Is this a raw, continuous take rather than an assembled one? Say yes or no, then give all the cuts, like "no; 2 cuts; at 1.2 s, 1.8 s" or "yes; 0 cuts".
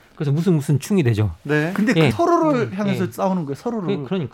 no; 1 cut; at 2.1 s